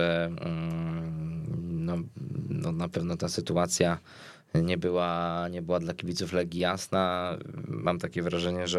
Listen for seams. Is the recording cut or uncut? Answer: uncut